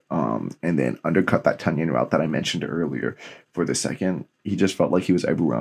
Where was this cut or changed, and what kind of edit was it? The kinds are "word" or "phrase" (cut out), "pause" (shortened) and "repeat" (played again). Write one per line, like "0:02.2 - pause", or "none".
none